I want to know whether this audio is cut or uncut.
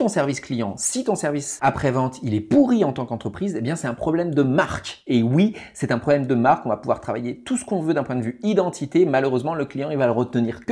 uncut